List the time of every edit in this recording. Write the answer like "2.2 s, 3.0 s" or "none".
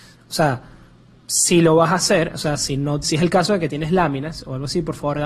3.0 s